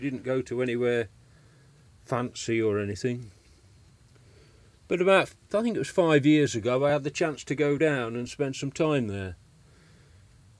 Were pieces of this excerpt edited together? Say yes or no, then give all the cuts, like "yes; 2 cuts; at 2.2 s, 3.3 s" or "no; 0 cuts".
no; 0 cuts